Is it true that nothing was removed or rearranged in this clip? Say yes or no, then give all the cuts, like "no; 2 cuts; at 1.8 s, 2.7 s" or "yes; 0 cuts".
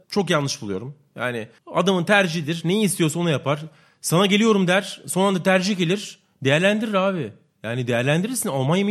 yes; 0 cuts